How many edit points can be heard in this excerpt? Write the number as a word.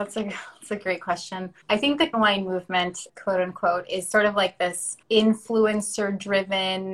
four